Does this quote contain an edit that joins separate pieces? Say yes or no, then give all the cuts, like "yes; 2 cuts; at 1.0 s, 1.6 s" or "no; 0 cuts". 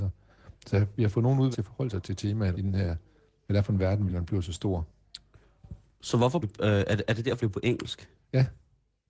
yes; 5 cuts; at 1.5 s, 2.5 s, 4.1 s, 6.4 s, 7.4 s